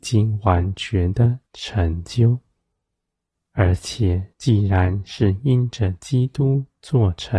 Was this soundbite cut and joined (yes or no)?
yes